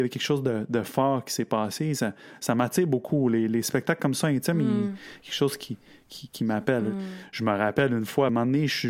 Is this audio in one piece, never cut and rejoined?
yes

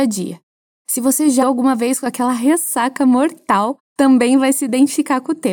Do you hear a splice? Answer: yes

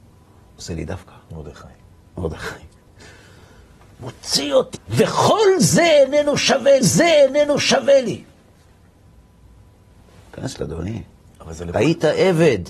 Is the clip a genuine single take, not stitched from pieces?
no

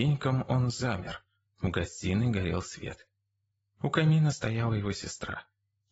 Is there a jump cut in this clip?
no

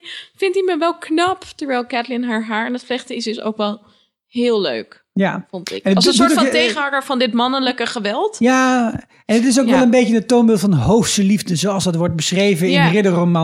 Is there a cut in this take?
no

